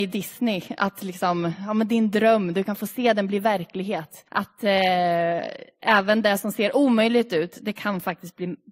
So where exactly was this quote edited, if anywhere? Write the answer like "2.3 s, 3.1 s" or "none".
4.3 s